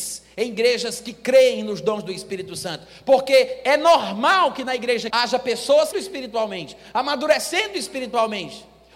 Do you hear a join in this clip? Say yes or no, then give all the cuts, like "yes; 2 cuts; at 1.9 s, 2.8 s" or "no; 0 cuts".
yes; 2 cuts; at 5.1 s, 5.9 s